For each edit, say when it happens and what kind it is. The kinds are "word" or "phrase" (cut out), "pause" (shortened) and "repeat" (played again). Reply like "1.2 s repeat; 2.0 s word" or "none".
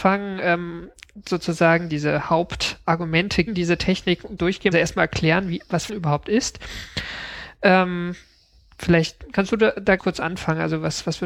1.9 s word; 3.5 s word; 4.4 s word; 4.7 s word; 5.9 s word; 10.0 s word